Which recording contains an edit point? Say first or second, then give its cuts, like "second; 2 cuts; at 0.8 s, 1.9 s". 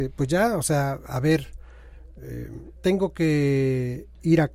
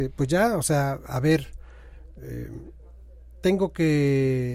first; 1 cut; at 2.8 s